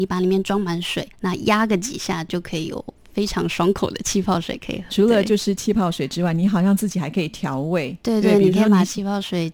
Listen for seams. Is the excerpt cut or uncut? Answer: cut